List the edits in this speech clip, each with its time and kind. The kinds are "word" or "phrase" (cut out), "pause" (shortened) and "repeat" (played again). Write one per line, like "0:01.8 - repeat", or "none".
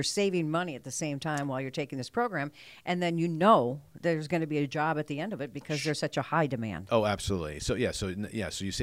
none